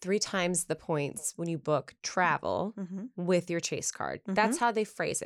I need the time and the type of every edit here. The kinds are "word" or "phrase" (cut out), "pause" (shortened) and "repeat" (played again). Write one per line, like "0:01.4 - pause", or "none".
none